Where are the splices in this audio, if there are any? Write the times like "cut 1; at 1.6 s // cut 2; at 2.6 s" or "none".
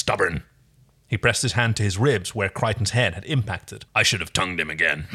cut 1; at 3.9 s

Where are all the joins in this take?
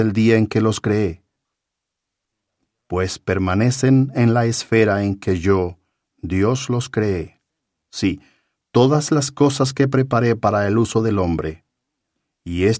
none

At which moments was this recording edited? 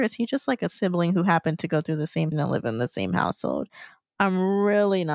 cut 1; at 2.3 s

